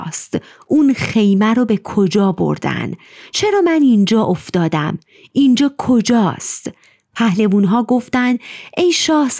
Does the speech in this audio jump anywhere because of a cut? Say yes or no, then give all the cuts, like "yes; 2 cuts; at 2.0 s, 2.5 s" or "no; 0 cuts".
no; 0 cuts